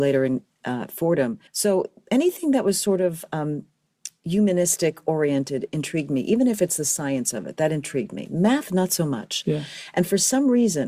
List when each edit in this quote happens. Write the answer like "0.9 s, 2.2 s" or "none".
1.5 s